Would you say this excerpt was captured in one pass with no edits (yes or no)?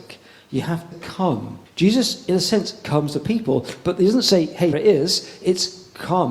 no